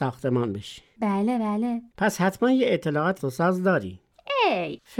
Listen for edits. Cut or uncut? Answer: cut